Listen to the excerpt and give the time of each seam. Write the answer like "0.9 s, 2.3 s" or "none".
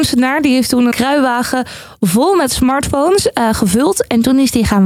0.9 s